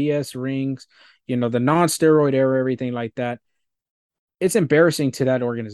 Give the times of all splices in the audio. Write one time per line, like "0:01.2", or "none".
none

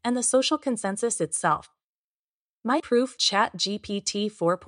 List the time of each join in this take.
0:02.8
0:03.2

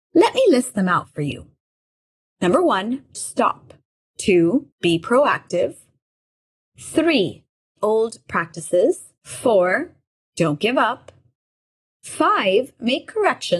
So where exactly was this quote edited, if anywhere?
0:03.1
0:04.7
0:07.8
0:09.2

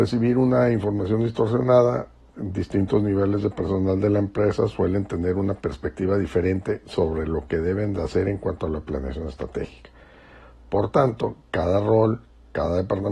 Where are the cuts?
none

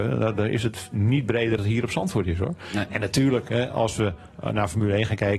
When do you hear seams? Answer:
0:01.6

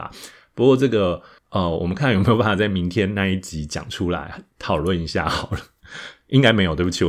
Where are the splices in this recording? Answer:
0:01.4

